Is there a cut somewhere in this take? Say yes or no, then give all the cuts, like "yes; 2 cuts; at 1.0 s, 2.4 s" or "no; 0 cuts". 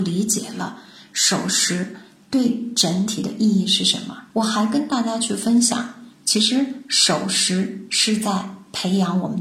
yes; 1 cut; at 4.3 s